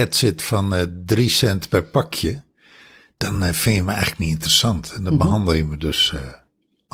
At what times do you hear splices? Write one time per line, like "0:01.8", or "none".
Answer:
none